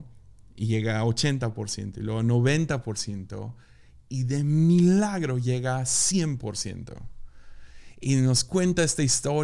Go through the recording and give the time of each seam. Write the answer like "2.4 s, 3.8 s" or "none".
none